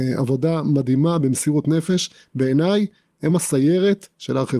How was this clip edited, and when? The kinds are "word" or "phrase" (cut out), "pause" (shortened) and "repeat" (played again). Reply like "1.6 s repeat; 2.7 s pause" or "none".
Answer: none